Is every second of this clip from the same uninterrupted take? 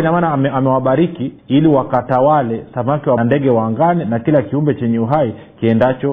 no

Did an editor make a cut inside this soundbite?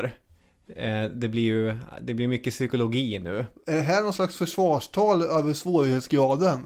no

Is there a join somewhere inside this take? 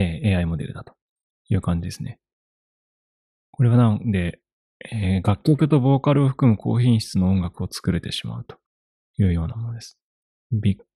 no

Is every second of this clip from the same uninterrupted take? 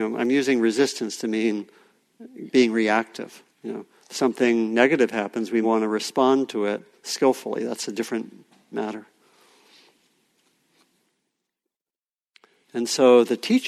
no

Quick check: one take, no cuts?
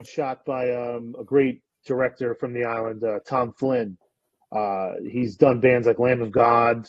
yes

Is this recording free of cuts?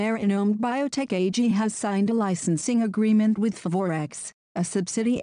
yes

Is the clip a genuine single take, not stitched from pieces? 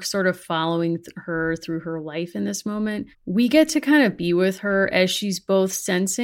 no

